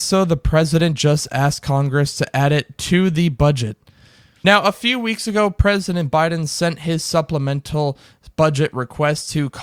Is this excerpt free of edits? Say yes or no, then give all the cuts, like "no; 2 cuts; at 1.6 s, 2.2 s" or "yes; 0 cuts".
yes; 0 cuts